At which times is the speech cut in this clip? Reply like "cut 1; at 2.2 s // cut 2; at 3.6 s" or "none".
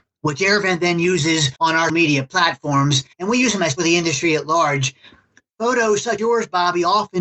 cut 1; at 1.6 s // cut 2; at 1.9 s // cut 3; at 3.1 s // cut 4; at 3.8 s // cut 5; at 6.2 s